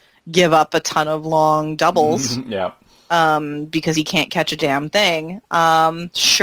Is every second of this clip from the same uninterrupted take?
yes; 0 cuts

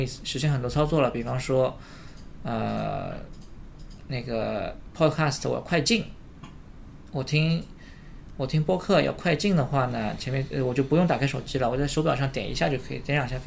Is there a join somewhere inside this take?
no; 0 cuts

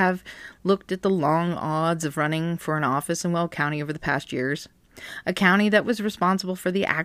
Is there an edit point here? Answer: no; 0 cuts

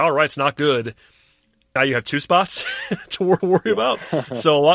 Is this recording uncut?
no; 2 cuts; at 1.8 s, 3.4 s

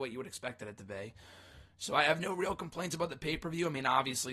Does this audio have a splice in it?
no; 0 cuts

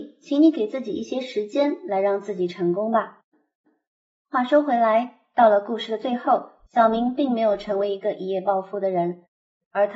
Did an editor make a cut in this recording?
no; 0 cuts

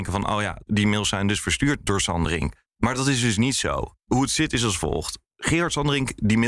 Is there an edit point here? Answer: yes; 1 cut; at 5.3 s

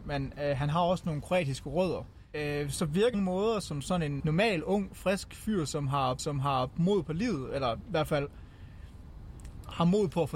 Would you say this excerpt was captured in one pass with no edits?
no; 3 cuts; at 3.1 s, 4.2 s, 6.2 s

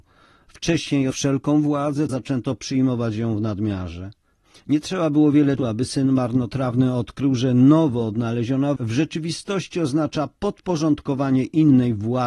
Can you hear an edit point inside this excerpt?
yes; 4 cuts; at 1.1 s, 2.1 s, 5.6 s, 8.8 s

